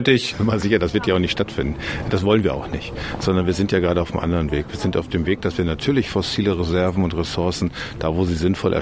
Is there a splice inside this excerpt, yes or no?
no